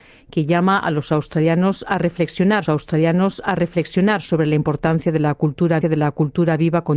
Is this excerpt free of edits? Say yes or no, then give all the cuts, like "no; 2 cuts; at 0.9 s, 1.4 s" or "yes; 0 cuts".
no; 2 cuts; at 2.6 s, 5.8 s